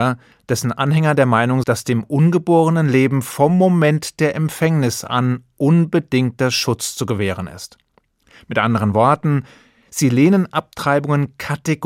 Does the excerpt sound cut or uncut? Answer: cut